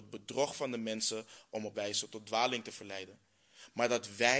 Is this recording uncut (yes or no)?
no